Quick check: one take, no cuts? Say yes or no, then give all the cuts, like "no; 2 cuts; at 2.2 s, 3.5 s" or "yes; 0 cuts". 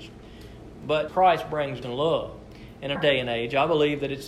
no; 3 cuts; at 1.1 s, 1.8 s, 3.0 s